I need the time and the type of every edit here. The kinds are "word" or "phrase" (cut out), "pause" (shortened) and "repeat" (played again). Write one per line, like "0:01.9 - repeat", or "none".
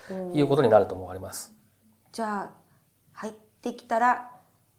none